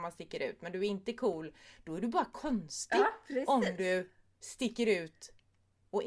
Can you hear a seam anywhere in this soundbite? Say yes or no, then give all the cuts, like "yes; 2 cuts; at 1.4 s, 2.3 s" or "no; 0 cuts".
no; 0 cuts